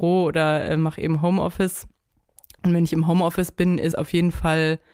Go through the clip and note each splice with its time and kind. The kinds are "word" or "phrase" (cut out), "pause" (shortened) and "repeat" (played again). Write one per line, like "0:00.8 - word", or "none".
0:03.9 - word